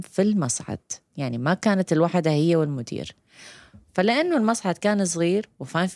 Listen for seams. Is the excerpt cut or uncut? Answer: uncut